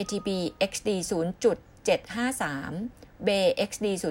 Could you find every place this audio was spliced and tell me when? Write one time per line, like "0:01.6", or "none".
0:01.7